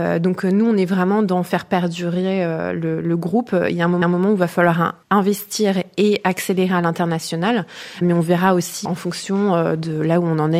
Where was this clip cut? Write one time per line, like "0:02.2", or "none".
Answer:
0:04.0
0:05.0
0:08.0
0:08.8